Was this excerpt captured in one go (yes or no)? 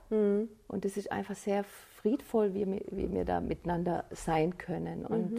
yes